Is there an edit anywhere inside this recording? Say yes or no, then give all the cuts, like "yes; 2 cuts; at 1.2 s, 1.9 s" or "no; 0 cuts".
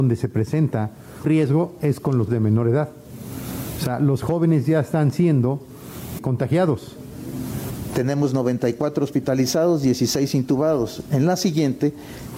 yes; 3 cuts; at 1.2 s, 2.3 s, 6.2 s